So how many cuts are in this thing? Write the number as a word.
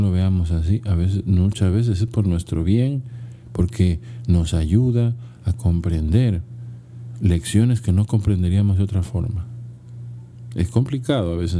zero